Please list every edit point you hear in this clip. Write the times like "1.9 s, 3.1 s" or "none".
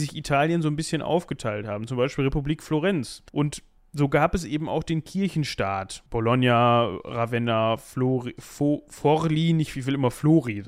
3.3 s, 6.1 s